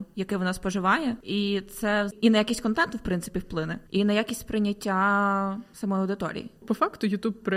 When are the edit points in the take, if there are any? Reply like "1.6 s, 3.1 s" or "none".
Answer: none